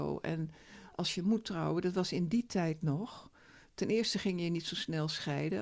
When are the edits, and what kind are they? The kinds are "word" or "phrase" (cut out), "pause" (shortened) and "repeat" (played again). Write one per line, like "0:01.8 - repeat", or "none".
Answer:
none